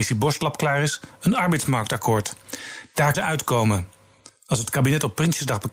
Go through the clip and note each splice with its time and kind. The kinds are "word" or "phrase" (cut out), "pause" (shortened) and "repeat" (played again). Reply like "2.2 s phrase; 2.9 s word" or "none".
3.1 s word